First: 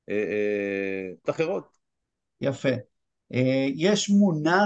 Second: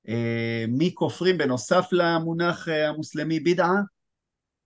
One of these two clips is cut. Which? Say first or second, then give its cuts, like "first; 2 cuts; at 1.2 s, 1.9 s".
first; 1 cut; at 1.2 s